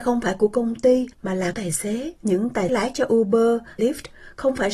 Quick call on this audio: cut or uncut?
cut